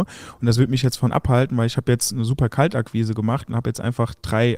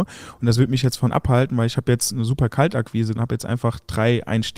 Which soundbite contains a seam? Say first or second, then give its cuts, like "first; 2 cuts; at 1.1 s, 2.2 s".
second; 1 cut; at 3.1 s